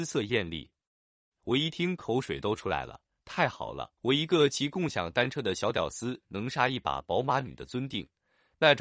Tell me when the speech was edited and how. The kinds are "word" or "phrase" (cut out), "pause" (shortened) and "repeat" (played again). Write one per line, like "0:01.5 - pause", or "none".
0:04.0 - pause